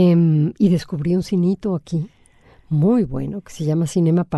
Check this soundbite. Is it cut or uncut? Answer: uncut